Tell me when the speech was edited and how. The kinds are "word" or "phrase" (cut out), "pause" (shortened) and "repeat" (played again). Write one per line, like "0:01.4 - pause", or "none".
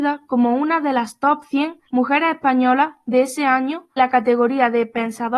0:01.9 - pause
0:04.0 - word